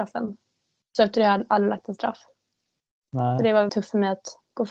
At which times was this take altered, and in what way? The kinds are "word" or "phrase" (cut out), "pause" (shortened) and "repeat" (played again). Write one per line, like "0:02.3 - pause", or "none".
0:03.7 - word